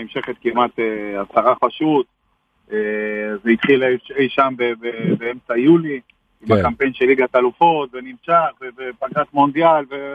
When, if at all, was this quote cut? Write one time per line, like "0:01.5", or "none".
0:01.6